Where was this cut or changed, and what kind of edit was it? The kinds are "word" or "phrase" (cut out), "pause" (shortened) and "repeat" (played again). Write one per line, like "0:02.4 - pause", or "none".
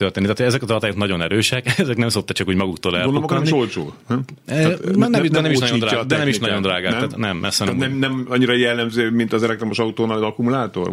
none